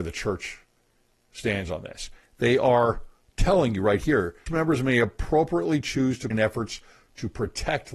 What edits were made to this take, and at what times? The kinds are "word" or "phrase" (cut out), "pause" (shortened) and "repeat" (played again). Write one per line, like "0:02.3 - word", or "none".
0:04.5 - word
0:06.3 - word